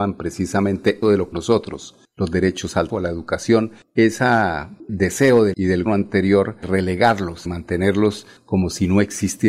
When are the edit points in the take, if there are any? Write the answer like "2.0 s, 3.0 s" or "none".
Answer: 1.0 s, 1.3 s, 2.9 s, 4.9 s, 5.5 s, 5.9 s, 6.6 s, 7.5 s